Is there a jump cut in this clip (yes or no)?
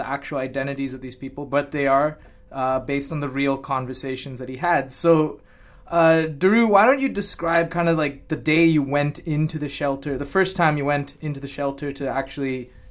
no